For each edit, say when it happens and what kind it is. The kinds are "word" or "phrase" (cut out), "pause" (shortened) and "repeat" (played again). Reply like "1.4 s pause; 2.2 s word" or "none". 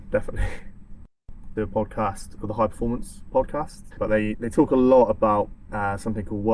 1.6 s phrase; 2.4 s word; 3.9 s word; 4.3 s word